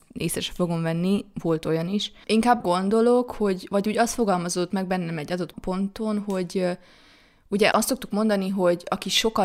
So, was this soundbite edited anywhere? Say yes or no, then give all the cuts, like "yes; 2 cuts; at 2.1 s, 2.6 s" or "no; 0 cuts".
yes; 3 cuts; at 2.6 s, 5.5 s, 7.7 s